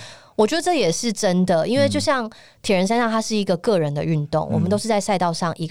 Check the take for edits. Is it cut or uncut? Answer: uncut